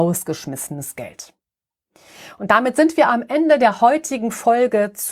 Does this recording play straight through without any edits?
yes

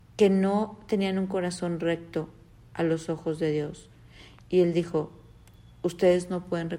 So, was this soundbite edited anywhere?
no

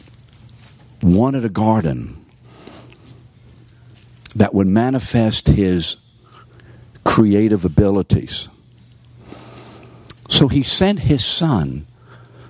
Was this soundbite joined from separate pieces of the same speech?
no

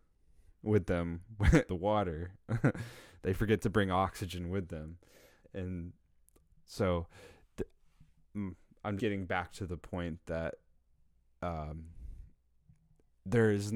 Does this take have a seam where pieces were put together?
yes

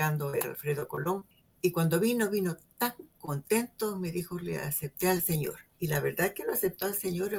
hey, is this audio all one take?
yes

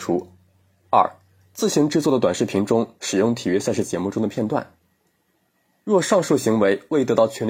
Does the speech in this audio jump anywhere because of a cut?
no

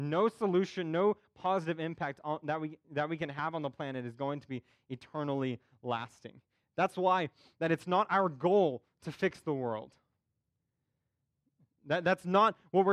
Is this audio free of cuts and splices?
yes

